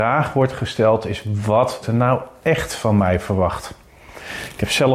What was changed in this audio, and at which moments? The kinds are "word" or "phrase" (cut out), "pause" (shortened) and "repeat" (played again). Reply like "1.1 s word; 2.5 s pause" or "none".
1.8 s word